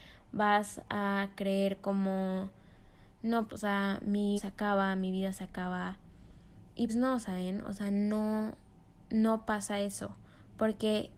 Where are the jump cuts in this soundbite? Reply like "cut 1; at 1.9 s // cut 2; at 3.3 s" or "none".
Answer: cut 1; at 3.5 s // cut 2; at 4.4 s // cut 3; at 6.9 s

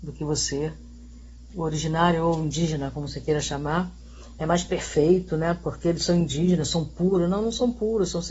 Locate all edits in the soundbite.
none

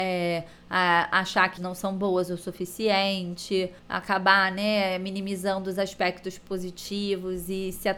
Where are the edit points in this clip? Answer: cut 1; at 1.6 s // cut 2; at 3.8 s

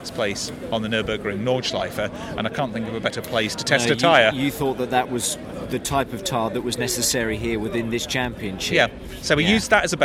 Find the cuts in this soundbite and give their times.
none

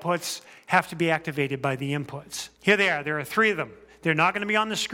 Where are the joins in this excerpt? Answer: cut 1; at 2.5 s

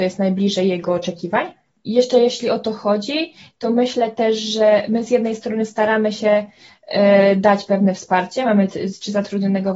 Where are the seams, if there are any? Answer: none

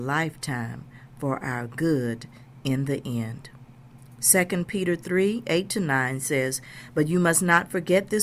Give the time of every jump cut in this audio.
none

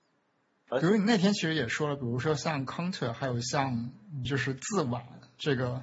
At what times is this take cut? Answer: cut 1; at 4.2 s

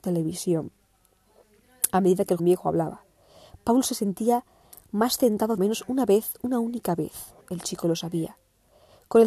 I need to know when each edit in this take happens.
cut 1; at 2.4 s // cut 2; at 5.6 s // cut 3; at 7.4 s

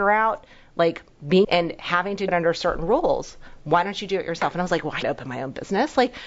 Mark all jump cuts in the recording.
cut 1; at 1.4 s // cut 2; at 2.3 s // cut 3; at 5.0 s

